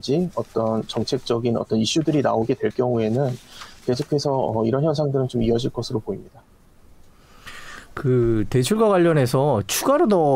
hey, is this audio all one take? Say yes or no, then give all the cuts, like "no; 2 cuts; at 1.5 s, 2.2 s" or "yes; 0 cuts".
yes; 0 cuts